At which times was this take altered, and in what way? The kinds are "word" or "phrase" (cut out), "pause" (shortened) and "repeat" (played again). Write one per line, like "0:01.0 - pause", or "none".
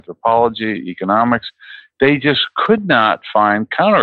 none